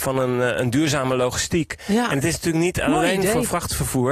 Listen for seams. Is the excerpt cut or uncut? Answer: uncut